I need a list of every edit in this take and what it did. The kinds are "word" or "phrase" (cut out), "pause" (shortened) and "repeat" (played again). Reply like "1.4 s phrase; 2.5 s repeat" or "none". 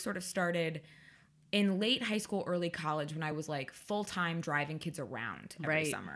none